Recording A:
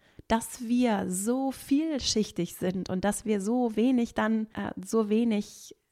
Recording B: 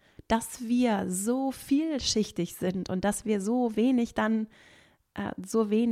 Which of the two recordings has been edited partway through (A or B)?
A